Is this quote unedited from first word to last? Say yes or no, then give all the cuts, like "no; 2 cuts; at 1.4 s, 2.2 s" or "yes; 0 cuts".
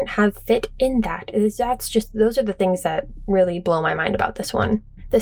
yes; 0 cuts